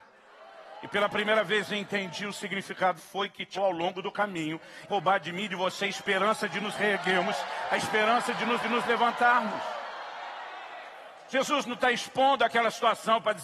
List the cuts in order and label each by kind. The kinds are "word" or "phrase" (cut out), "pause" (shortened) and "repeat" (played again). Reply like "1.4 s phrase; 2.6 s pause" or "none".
3.0 s phrase; 3.5 s word; 4.9 s phrase; 8.6 s repeat

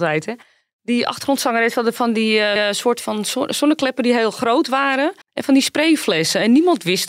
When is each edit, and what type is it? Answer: 2.6 s repeat; 5.2 s pause

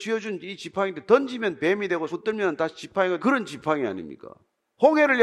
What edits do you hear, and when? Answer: 2.1 s word; 3.2 s word

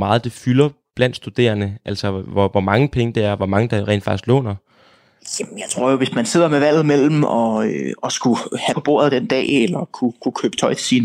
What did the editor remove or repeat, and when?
8.7 s word

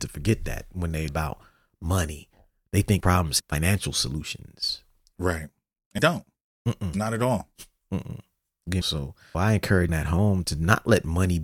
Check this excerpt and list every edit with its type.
1.1 s word; 3.0 s word; 3.4 s word; 6.0 s word; 8.8 s word; 9.3 s word; 9.9 s word; 10.4 s word

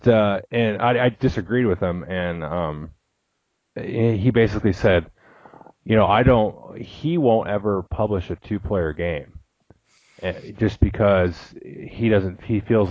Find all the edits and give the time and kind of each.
none

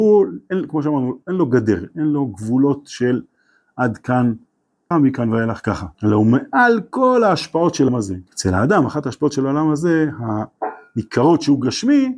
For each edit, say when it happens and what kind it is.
4.9 s word; 5.9 s pause; 7.9 s word; 8.3 s pause

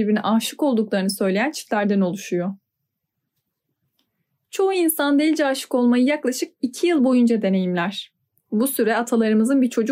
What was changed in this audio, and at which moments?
none

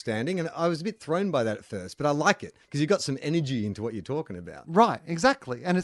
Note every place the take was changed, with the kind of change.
2.6 s pause

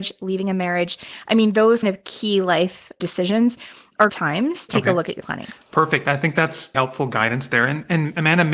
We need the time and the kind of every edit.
1.8 s word; 3.0 s word; 4.1 s word; 4.7 s word; 5.2 s word; 6.7 s word

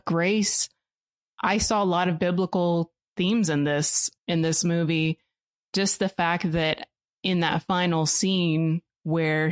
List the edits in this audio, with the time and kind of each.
4.2 s word

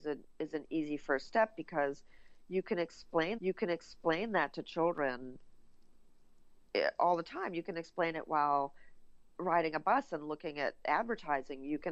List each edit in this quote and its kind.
3.4 s repeat

